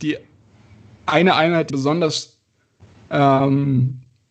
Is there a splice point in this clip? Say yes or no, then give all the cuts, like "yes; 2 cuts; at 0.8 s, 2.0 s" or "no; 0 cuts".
yes; 1 cut; at 1.7 s